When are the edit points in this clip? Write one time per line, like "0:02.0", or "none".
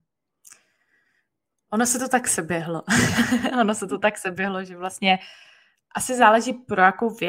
none